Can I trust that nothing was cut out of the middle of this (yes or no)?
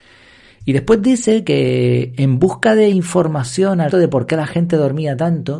no